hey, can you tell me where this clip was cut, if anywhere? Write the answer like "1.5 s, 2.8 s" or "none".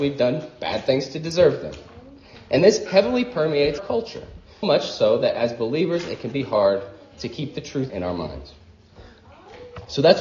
2.9 s, 3.8 s, 4.6 s, 7.9 s

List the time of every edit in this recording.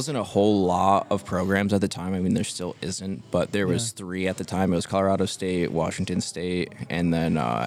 none

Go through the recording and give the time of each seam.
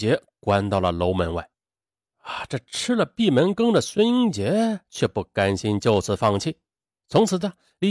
none

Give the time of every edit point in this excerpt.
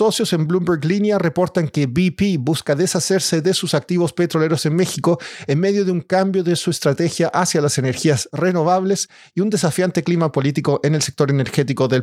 none

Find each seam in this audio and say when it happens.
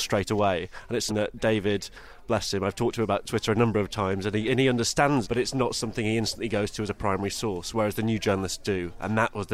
1.1 s, 5.2 s

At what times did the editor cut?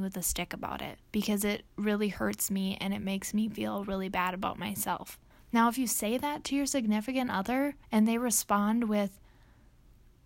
1.0 s, 5.3 s, 7.8 s

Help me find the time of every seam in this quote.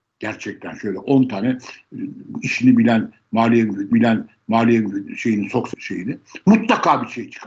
3.9 s, 5.7 s

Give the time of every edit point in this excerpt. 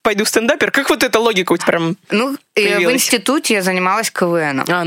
1.6 s

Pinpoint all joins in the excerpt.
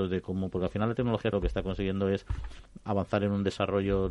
1.3 s

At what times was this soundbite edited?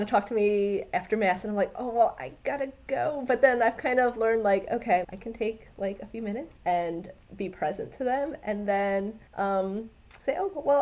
5.0 s, 6.6 s, 9.3 s

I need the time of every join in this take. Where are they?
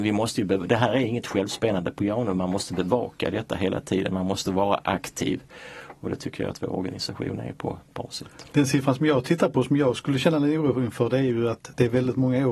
none

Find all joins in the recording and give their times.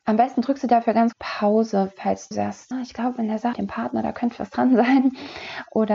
1.1 s, 2.3 s, 2.7 s, 3.5 s, 4.4 s

